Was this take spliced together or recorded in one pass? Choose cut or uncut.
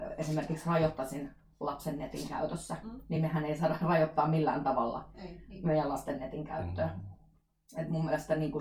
uncut